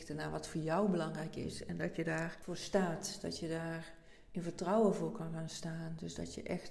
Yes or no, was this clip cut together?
no